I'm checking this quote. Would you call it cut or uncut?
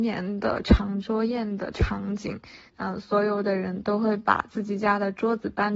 cut